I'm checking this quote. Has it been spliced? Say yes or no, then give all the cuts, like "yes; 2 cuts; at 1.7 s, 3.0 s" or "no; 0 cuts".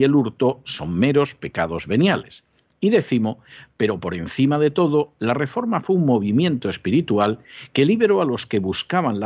no; 0 cuts